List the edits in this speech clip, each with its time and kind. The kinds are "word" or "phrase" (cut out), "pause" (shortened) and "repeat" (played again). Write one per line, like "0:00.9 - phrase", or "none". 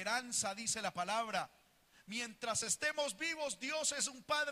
none